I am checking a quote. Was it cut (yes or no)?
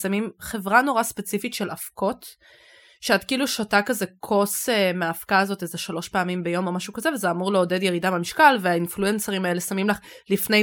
no